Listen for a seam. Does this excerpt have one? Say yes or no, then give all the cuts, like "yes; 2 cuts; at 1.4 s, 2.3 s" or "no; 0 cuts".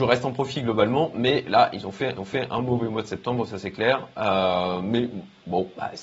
yes; 1 cut; at 2.1 s